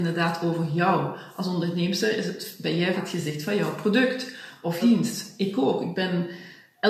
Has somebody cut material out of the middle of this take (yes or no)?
yes